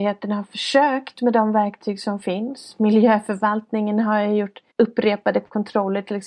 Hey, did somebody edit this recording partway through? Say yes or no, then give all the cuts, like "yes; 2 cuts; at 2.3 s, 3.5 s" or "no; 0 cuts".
yes; 1 cut; at 4.7 s